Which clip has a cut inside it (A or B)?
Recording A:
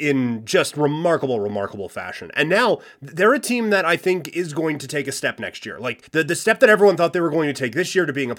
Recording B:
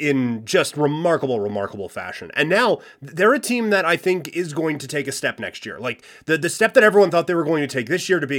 A